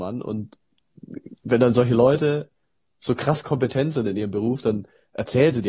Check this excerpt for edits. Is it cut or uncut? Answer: uncut